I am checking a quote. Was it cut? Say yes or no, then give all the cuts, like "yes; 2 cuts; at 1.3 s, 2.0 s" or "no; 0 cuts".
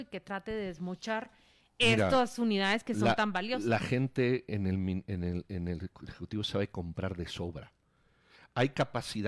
no; 0 cuts